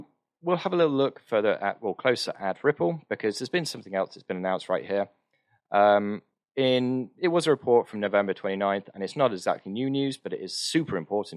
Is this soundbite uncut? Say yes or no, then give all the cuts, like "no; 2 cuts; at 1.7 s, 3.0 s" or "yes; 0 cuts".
yes; 0 cuts